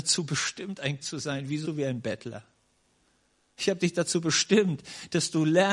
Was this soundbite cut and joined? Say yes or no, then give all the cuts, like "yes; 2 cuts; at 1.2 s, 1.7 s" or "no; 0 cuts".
yes; 2 cuts; at 1.0 s, 1.6 s